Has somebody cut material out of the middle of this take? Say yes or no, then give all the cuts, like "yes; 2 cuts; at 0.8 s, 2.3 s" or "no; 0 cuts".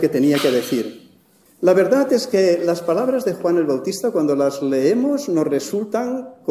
no; 0 cuts